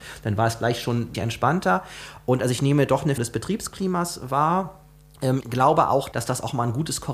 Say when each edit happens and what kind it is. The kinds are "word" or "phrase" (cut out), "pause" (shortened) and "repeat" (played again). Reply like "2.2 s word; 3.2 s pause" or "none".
1.1 s word; 3.2 s word; 5.4 s word; 6.1 s word